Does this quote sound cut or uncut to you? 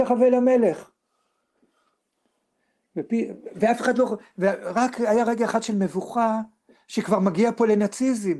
uncut